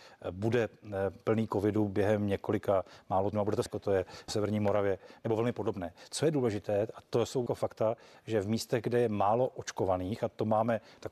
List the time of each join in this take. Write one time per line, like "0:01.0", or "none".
0:03.3
0:03.7
0:04.3
0:07.5